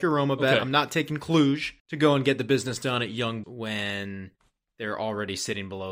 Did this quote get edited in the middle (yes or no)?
yes